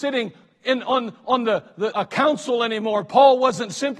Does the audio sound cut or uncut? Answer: cut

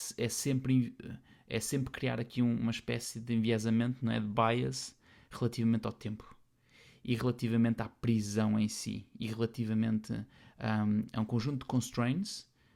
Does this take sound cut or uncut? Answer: uncut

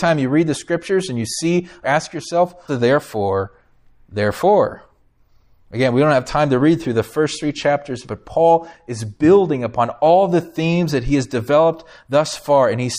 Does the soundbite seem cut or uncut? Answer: cut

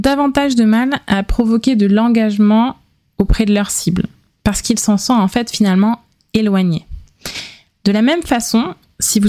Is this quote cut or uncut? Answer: uncut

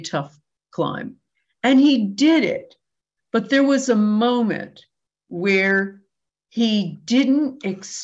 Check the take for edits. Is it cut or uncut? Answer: uncut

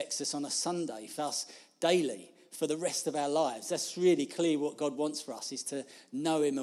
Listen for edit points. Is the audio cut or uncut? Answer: cut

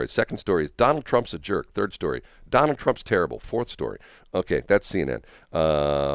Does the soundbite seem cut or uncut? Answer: uncut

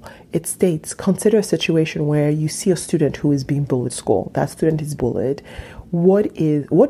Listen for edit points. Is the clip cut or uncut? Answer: cut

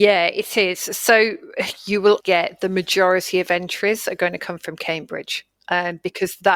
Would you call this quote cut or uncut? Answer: cut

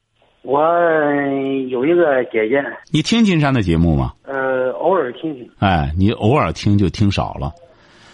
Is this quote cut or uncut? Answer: cut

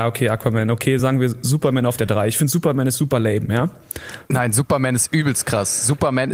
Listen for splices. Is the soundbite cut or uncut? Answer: uncut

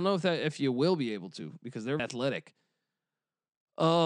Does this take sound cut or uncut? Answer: cut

